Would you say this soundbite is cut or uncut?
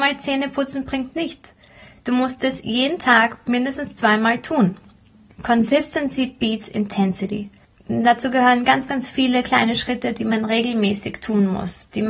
uncut